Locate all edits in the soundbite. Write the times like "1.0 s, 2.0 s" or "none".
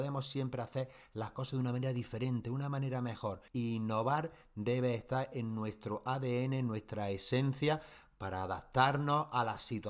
3.5 s